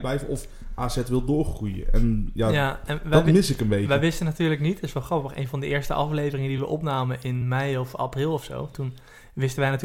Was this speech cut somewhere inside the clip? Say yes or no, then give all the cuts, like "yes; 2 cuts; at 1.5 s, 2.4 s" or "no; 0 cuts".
no; 0 cuts